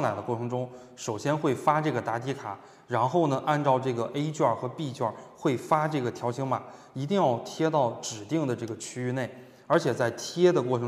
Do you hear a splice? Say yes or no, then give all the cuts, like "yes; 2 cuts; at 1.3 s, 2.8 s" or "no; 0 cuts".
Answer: no; 0 cuts